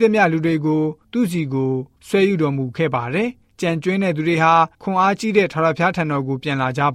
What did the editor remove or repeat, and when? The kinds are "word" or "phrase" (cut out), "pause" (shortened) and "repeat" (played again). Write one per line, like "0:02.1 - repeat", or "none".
0:04.7 - pause